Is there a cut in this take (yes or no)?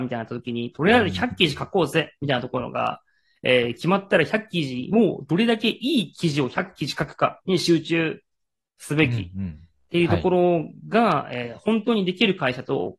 no